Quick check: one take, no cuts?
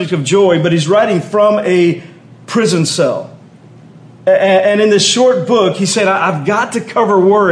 yes; 0 cuts

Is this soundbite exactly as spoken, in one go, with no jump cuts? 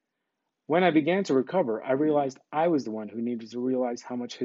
yes; 0 cuts

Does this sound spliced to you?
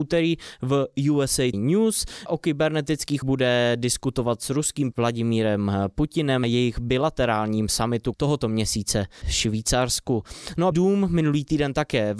yes; 8 cuts; at 1.5 s, 2.3 s, 3.2 s, 4.9 s, 6.4 s, 8.1 s, 9.2 s, 10.7 s

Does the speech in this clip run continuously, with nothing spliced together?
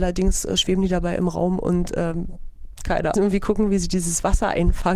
no; 1 cut; at 3.1 s

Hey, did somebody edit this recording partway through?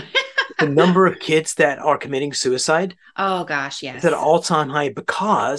no; 0 cuts

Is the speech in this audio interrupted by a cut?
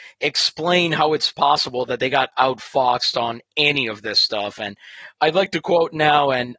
no; 0 cuts

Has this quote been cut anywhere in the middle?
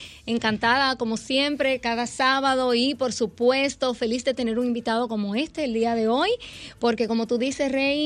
no; 0 cuts

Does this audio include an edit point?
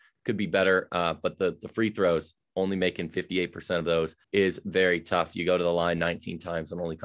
yes; 1 cut; at 4.2 s

